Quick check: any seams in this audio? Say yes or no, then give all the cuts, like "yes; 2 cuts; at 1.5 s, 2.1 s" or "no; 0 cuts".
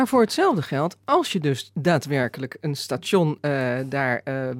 no; 0 cuts